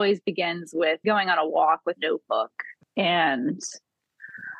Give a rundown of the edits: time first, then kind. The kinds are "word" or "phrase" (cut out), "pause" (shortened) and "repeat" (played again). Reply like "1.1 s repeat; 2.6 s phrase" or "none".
1.0 s word; 2.0 s word

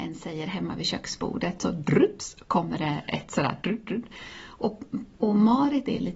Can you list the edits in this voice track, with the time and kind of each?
3.6 s word

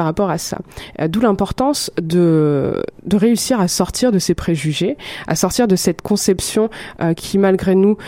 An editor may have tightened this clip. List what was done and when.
none

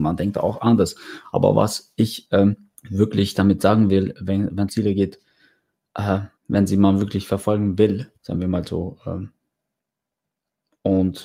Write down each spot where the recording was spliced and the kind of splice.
2.8 s pause; 4.7 s word; 6.4 s pause; 8.2 s pause

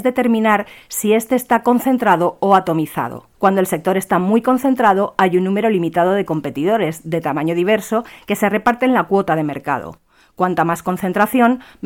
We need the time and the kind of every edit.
3.3 s pause

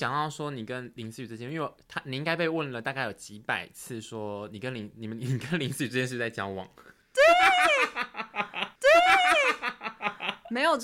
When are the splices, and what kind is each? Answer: 8.8 s repeat

